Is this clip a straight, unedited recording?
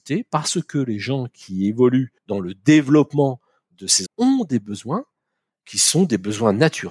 no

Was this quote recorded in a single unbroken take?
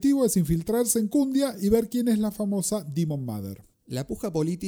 no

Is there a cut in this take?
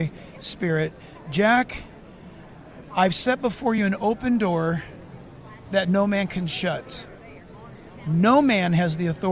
no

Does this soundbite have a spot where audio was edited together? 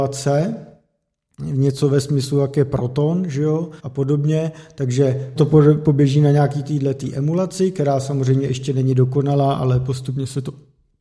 yes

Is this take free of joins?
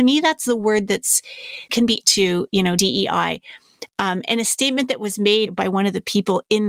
no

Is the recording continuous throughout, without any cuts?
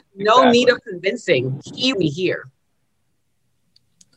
no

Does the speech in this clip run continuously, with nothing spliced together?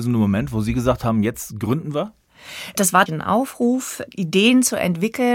no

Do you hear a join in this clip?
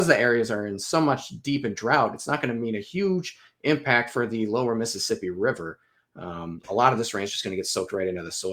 no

